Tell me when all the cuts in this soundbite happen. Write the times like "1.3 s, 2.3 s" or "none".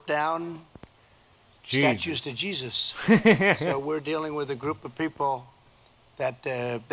none